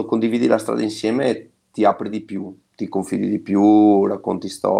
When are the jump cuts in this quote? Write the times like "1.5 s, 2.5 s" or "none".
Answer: none